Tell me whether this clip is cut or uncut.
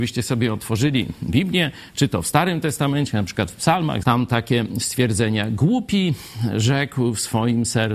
cut